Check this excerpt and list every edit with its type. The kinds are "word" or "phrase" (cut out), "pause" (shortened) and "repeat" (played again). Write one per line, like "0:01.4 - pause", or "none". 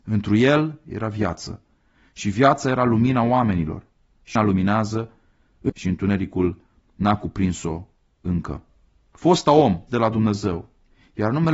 0:04.4 - word
0:05.7 - word
0:09.9 - word